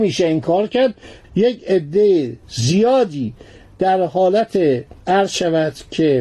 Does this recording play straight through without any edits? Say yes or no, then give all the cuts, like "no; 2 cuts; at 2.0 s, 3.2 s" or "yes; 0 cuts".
no; 1 cut; at 5.0 s